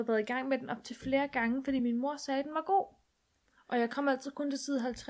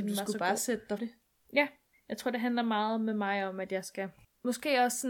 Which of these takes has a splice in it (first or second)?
second